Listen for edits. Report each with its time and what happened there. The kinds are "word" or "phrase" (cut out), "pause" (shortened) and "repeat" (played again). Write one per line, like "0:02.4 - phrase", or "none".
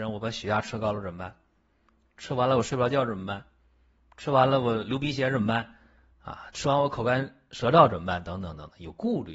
none

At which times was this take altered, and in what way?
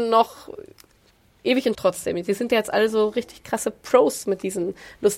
0:01.7 - phrase

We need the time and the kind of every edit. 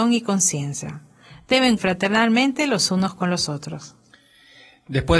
0:01.8 - word

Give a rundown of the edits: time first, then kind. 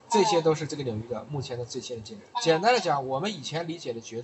0:02.3 - pause

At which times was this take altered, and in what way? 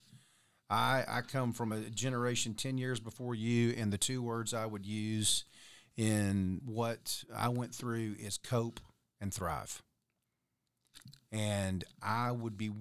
0:06.6 - word

